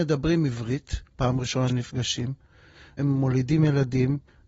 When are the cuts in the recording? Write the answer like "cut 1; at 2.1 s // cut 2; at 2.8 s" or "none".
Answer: cut 1; at 1.1 s // cut 2; at 1.7 s // cut 3; at 3.0 s